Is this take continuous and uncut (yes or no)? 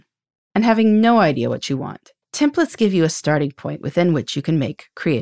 no